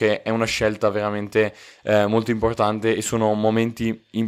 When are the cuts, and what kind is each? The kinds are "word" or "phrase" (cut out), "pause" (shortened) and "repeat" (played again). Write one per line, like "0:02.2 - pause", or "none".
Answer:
none